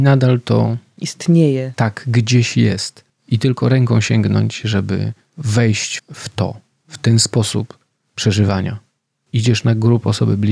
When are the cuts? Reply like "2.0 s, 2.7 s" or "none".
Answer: 6.0 s